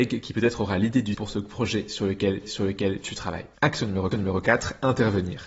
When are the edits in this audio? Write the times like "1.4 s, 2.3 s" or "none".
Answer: 1.1 s, 2.4 s, 3.5 s, 4.1 s